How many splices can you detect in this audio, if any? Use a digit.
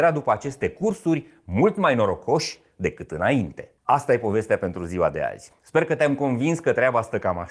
1